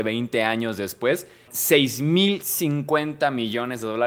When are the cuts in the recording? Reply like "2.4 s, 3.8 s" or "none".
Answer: 1.5 s